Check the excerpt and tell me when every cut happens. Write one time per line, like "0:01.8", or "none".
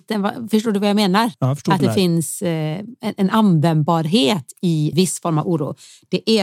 0:01.8
0:04.9